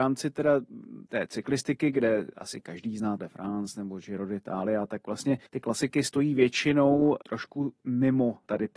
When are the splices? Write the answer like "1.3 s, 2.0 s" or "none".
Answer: 1.1 s, 3.2 s, 5.5 s, 7.2 s